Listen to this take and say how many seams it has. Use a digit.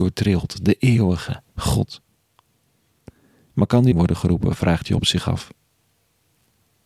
2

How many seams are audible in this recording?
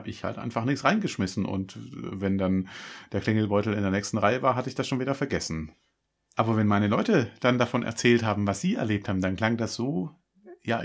0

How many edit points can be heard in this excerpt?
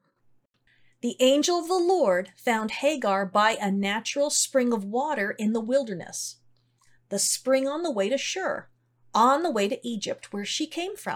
0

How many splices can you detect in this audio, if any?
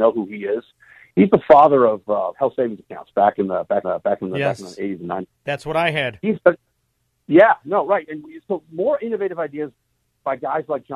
1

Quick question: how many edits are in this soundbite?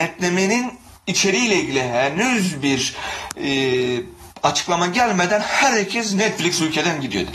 0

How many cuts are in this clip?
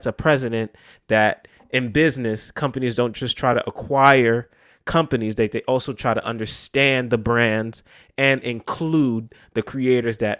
0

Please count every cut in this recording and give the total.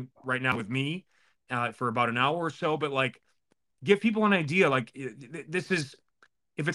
0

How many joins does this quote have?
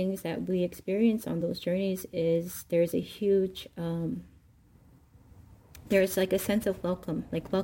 0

